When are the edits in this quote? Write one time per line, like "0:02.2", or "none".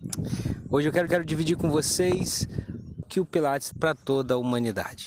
0:01.1
0:03.0
0:03.7